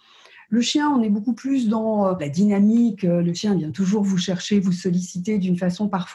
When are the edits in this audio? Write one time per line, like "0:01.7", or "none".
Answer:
none